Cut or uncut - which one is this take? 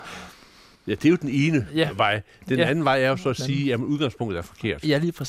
uncut